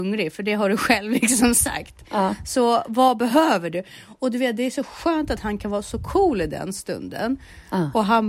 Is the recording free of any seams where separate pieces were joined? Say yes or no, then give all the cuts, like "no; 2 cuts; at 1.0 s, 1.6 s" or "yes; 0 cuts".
yes; 0 cuts